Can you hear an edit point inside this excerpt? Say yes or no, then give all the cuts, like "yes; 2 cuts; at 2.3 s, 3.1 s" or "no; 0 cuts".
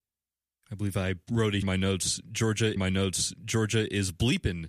yes; 3 cuts; at 1.2 s, 1.6 s, 2.8 s